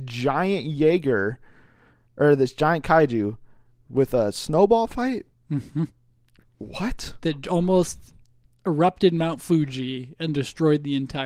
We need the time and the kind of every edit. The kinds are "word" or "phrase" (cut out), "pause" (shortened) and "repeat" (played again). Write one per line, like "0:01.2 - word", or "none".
none